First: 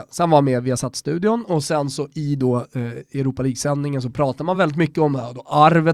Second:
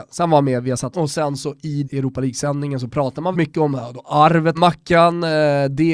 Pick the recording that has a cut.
second; 4 cuts; at 0.9 s, 1.8 s, 3.3 s, 4.5 s

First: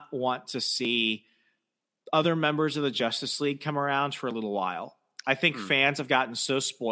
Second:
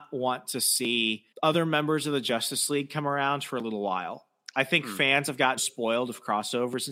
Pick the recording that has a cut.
second; 2 cuts; at 1.3 s, 5.6 s

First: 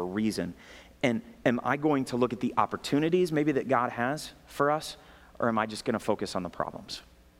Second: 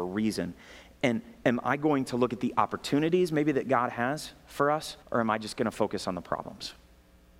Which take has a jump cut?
second; 1 cut; at 5.0 s

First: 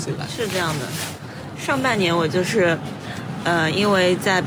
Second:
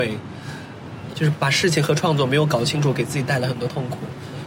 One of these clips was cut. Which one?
second; 1 cut; at 1.1 s

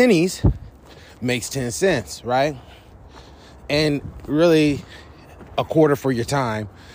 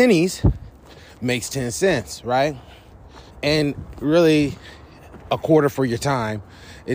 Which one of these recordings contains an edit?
second; 1 cut; at 3.3 s

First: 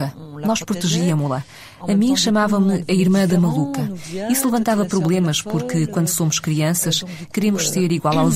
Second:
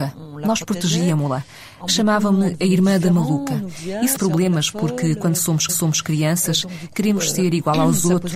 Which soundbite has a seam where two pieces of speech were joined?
second; 3 cuts; at 1.9 s, 4.2 s, 5.7 s

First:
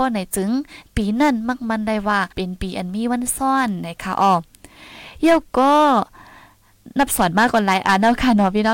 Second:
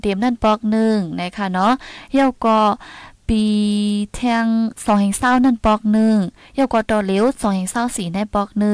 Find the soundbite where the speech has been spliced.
first; 1 cut; at 2.3 s

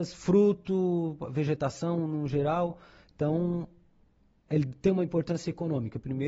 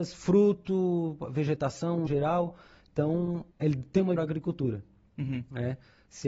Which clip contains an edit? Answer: second; 3 cuts; at 2.1 s, 3.5 s, 4.2 s

